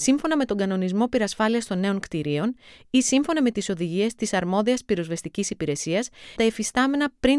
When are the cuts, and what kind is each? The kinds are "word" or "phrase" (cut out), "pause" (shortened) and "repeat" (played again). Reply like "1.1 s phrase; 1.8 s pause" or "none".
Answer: 6.4 s word